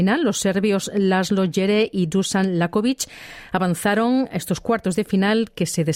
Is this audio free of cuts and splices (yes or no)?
yes